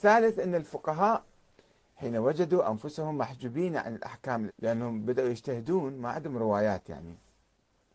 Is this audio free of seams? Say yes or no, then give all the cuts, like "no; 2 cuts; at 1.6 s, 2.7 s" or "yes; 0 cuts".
no; 1 cut; at 4.5 s